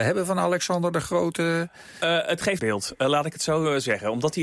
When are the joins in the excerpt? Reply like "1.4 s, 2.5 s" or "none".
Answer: 2.6 s